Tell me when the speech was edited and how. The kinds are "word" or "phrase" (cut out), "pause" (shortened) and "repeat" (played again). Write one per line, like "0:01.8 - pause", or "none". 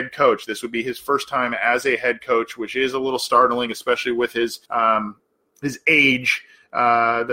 0:04.6 - pause